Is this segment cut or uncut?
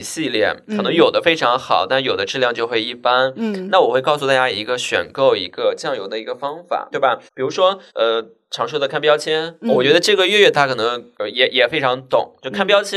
cut